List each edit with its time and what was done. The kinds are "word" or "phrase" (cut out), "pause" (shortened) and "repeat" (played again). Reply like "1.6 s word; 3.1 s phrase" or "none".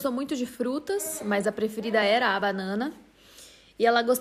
none